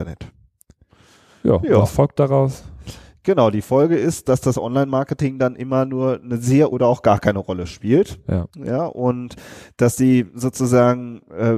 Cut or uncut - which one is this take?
cut